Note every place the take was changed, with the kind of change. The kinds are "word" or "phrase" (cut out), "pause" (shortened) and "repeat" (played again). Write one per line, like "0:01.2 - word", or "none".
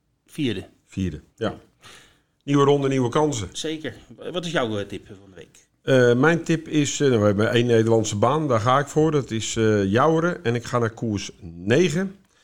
0:01.3 - pause